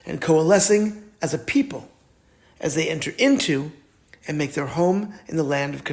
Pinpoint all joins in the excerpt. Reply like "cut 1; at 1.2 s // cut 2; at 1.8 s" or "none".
none